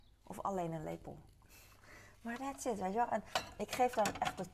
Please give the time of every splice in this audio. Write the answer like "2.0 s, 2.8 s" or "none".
none